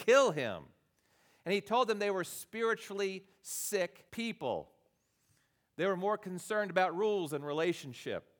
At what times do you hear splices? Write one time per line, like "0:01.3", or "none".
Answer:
0:04.1